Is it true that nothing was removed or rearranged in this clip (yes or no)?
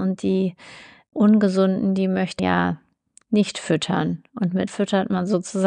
no